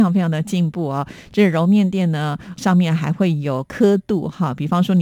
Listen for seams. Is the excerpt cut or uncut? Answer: cut